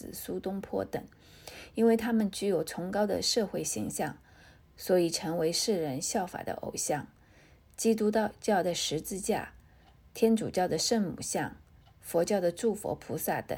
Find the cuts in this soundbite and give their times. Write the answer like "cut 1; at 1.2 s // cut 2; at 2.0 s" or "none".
none